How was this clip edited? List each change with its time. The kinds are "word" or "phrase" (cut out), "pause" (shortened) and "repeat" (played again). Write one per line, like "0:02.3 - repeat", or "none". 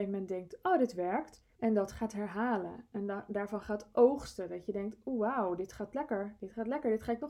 0:01.5 - pause